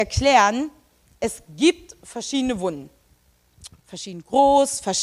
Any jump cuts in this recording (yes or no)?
no